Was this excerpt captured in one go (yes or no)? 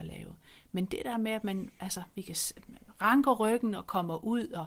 yes